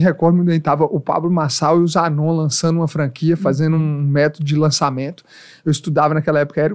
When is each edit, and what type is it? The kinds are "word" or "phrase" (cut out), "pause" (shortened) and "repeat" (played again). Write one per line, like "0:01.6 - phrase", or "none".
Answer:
none